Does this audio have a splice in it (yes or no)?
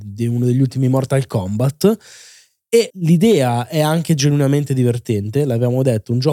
yes